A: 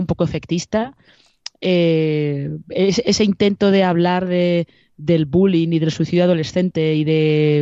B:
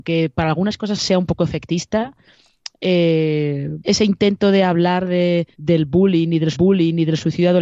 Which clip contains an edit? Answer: B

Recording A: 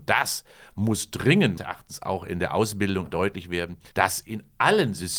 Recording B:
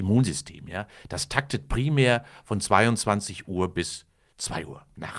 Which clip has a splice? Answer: A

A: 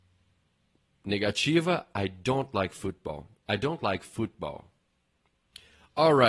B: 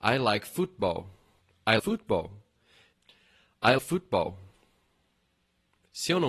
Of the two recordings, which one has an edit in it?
B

